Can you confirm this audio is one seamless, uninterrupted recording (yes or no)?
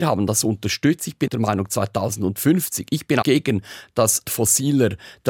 no